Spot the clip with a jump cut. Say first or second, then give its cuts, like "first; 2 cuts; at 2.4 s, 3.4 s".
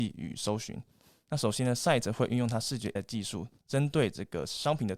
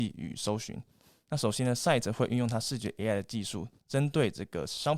first; 1 cut; at 3.0 s